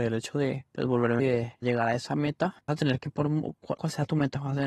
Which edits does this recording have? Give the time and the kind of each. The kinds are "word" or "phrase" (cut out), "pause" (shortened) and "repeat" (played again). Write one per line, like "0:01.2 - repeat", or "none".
0:01.2 - word
0:01.6 - word
0:02.7 - word
0:03.1 - word
0:03.8 - word